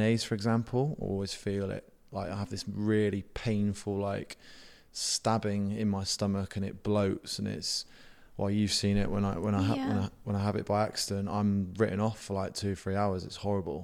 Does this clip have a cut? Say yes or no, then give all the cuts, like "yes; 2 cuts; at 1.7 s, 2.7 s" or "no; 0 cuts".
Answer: no; 0 cuts